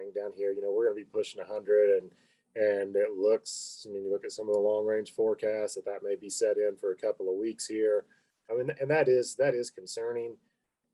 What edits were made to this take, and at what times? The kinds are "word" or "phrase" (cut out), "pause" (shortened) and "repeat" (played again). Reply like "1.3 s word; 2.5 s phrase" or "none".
none